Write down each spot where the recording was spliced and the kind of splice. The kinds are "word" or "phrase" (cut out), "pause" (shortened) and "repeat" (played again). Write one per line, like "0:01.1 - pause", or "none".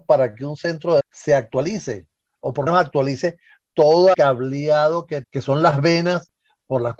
0:01.0 - word
0:02.7 - phrase
0:04.1 - word
0:05.2 - word